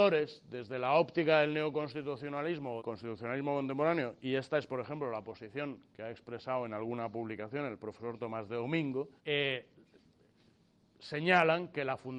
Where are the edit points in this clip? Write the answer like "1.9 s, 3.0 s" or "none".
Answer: 2.8 s, 9.2 s